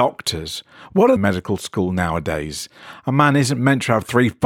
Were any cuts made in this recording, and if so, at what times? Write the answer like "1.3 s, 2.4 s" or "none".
1.2 s